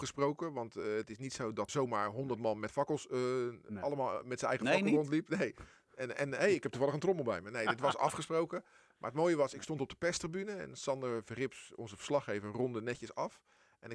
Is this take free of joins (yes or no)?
no